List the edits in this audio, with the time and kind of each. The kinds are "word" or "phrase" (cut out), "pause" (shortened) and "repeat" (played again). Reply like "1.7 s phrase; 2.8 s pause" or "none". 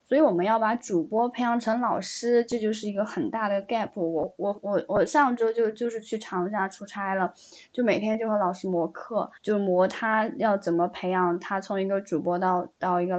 9.4 s pause